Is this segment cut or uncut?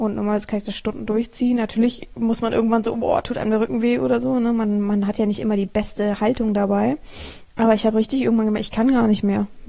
uncut